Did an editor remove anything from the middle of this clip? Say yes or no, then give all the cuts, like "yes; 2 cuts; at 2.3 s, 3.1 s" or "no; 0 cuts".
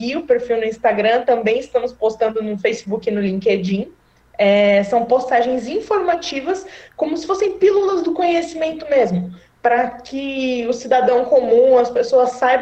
no; 0 cuts